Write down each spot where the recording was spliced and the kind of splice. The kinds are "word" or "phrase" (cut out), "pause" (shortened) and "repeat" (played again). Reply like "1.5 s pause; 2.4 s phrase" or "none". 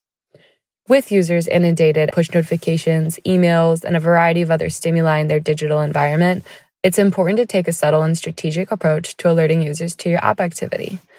2.1 s phrase